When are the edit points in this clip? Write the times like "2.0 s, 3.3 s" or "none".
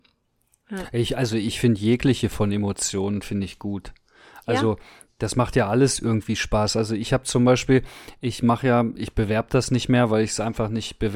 2.3 s